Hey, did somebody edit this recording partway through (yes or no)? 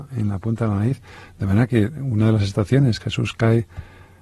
yes